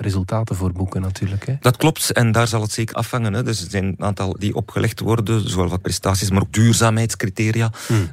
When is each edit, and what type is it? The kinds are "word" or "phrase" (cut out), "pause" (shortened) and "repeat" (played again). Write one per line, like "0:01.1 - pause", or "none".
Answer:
0:02.9 - word
0:04.4 - word
0:05.8 - word
0:06.5 - word

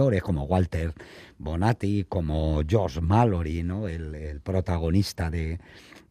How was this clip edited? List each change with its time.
none

